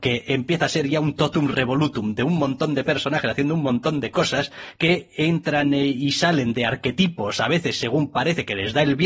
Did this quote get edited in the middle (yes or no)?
no